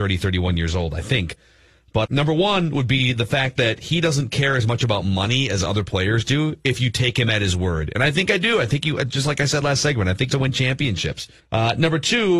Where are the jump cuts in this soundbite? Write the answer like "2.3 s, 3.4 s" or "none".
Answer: 2.0 s, 10.3 s, 11.4 s

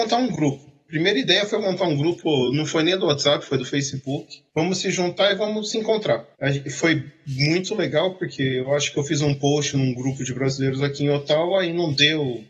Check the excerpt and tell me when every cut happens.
4.5 s, 6.3 s

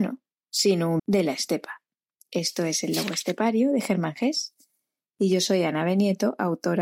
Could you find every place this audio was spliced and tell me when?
1.0 s, 2.1 s

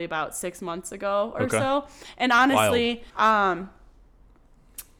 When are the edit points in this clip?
3.1 s

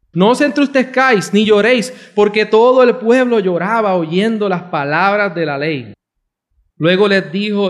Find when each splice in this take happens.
none

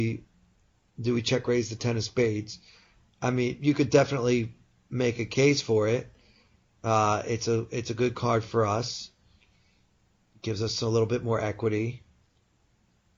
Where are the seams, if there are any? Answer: none

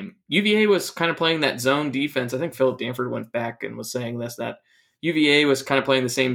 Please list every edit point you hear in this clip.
none

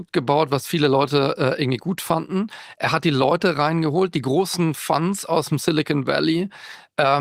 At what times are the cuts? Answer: none

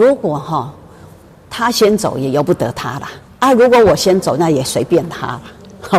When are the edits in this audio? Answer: 3.3 s

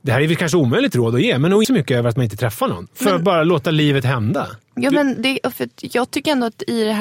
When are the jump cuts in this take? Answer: 1.6 s

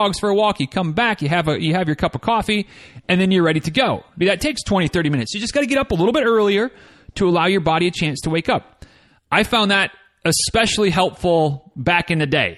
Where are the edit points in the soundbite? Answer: 4.2 s

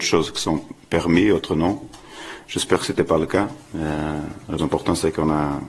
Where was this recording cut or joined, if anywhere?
4.6 s

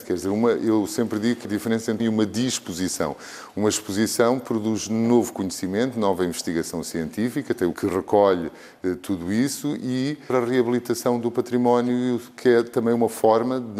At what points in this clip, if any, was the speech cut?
1.4 s, 2.0 s, 7.7 s, 10.3 s

